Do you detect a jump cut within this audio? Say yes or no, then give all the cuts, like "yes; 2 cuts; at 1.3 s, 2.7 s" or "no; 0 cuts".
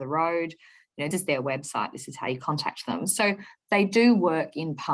yes; 1 cut; at 1.1 s